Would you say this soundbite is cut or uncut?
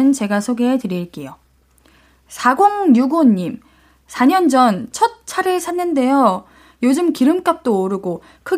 uncut